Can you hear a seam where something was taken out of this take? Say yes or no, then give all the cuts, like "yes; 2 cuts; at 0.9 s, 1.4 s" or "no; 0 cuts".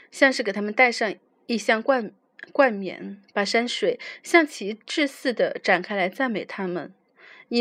no; 0 cuts